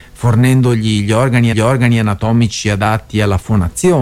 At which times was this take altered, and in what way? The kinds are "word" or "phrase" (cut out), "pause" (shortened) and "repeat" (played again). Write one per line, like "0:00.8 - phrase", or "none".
0:01.5 - repeat